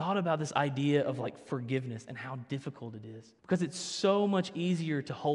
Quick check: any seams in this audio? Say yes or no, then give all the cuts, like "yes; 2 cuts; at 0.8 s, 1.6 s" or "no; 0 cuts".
yes; 1 cut; at 3.4 s